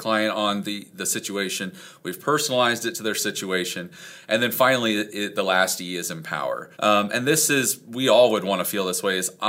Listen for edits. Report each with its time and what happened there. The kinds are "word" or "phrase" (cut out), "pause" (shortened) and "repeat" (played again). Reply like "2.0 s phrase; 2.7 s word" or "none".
6.7 s pause